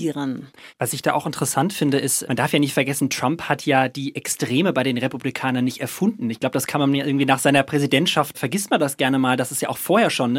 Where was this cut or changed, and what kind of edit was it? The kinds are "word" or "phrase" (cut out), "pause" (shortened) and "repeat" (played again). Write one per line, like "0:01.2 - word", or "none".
0:02.2 - word
0:08.3 - word